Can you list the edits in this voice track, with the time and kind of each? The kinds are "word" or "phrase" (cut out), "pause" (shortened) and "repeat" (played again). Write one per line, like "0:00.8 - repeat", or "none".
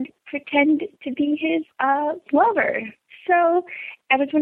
0:01.7 - pause